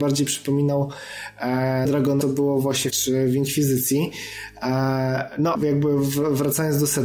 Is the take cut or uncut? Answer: cut